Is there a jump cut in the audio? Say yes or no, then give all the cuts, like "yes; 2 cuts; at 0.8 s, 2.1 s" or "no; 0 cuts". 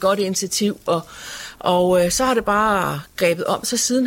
no; 0 cuts